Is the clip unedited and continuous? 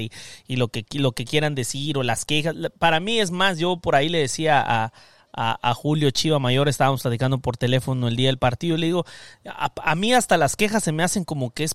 yes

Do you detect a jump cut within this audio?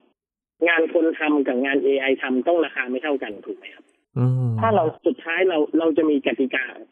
yes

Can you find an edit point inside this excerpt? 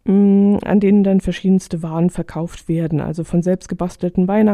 no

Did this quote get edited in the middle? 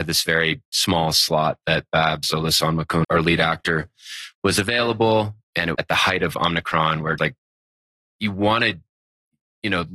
yes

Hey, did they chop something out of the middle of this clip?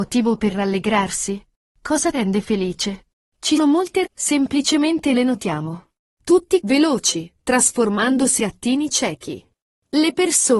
yes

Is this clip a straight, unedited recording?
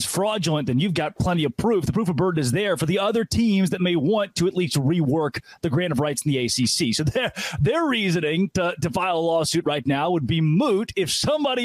yes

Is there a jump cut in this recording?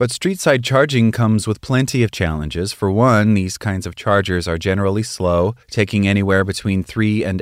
yes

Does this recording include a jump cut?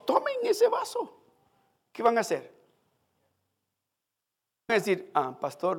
yes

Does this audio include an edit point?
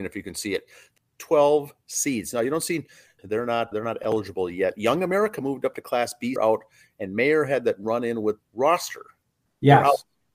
yes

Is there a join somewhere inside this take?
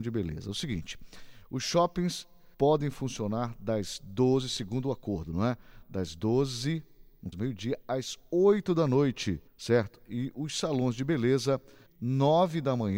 yes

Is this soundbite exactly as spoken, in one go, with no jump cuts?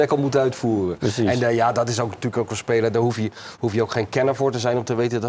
yes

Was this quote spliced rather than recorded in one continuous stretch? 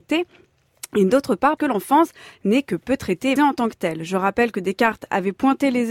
yes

